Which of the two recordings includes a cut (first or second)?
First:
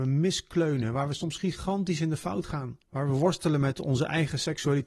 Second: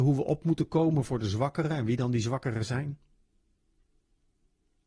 first